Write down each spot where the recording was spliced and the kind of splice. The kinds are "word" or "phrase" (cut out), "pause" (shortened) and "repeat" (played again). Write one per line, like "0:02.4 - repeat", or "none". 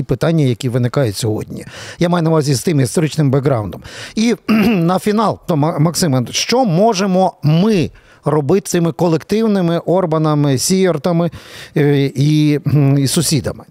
0:05.5 - word
0:08.7 - word